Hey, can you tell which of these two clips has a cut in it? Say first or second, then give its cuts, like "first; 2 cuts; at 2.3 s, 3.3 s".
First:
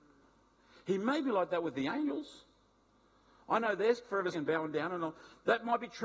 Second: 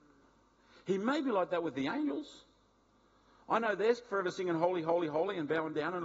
first; 1 cut; at 4.3 s